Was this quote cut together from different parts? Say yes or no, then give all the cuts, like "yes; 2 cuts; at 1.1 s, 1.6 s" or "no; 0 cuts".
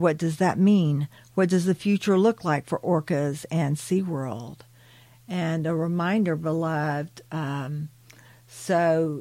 no; 0 cuts